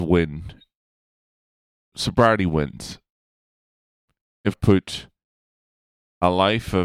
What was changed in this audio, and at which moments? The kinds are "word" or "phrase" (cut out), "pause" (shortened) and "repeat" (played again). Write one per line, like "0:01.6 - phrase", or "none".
0:04.5 - word